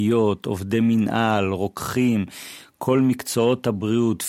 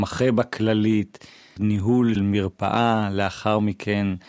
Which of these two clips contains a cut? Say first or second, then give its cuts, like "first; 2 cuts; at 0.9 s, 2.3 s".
second; 2 cuts; at 1.6 s, 2.2 s